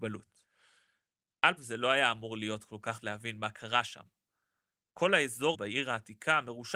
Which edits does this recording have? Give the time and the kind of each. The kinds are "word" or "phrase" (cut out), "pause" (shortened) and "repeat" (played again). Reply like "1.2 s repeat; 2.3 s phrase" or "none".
1.6 s word; 3.0 s word; 5.5 s word